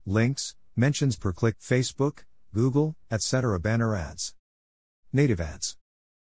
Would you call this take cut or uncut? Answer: cut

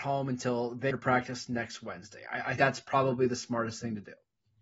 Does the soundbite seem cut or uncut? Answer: cut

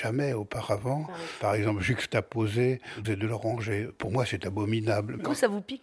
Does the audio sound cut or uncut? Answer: cut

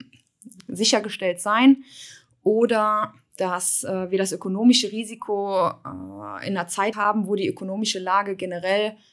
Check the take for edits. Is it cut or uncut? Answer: cut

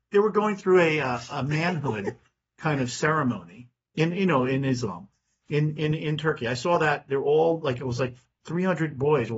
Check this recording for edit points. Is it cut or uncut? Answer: uncut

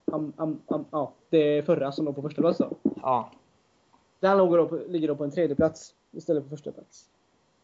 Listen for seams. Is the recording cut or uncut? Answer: uncut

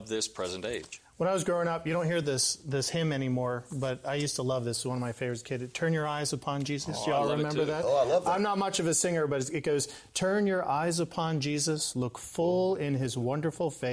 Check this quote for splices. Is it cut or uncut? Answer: uncut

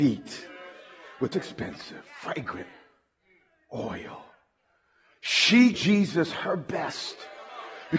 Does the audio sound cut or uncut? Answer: cut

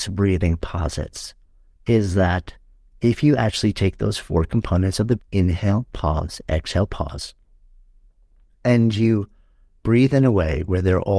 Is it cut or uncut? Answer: cut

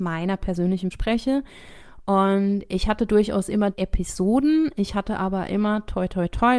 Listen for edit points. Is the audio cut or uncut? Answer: cut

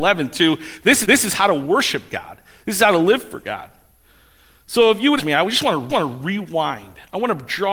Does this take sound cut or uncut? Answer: cut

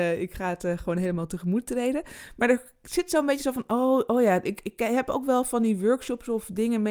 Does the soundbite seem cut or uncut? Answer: uncut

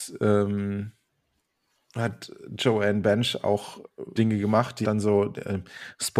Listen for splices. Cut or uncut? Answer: cut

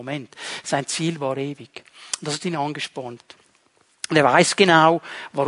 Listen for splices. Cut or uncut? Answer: uncut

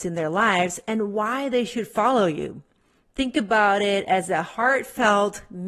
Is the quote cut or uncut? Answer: uncut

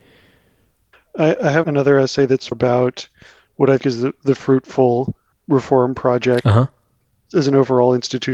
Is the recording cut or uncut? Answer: cut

